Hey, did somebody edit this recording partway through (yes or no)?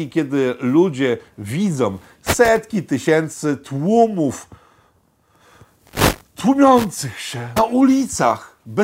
yes